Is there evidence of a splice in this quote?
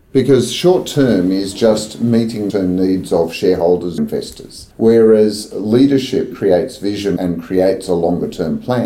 yes; 5 cuts; at 2.5 s, 4.0 s, 4.7 s, 6.3 s, 7.2 s

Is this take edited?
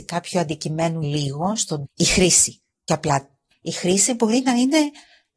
yes; 4 cuts; at 1.0 s, 1.9 s, 2.9 s, 3.5 s

